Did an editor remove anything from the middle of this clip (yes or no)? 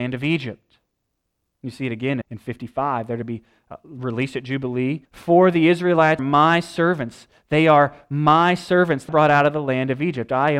yes